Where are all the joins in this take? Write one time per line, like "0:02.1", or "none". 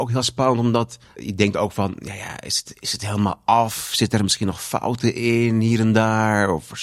0:01.0